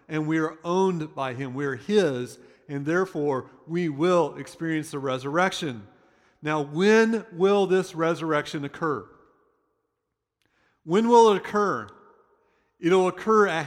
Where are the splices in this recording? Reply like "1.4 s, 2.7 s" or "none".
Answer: none

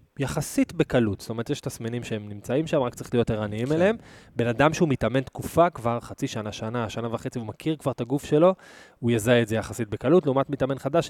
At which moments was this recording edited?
none

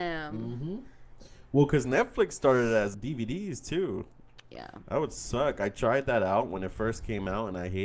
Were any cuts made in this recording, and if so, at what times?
2.9 s

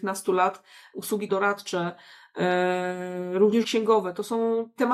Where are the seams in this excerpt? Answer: 1.3 s, 3.6 s

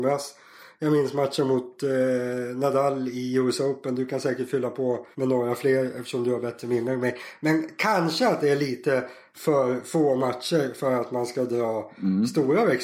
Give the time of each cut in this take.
5.1 s

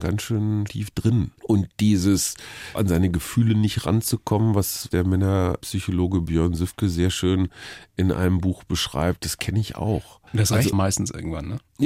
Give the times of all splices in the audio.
1.4 s, 2.8 s, 10.3 s, 10.7 s

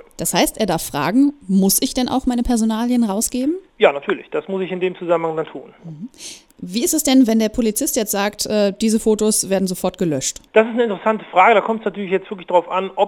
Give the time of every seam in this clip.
3.7 s, 5.5 s, 6.5 s, 10.5 s

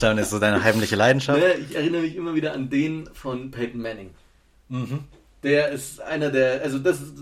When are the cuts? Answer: none

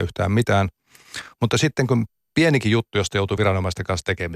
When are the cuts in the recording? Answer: none

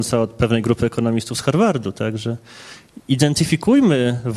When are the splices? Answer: none

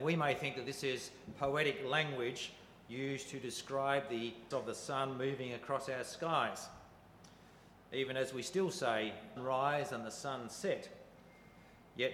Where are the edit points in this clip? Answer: 4.5 s, 9.4 s

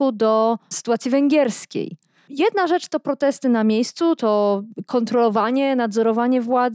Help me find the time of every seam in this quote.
none

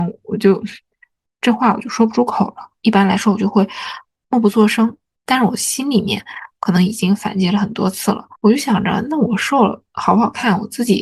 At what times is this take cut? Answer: 8.3 s

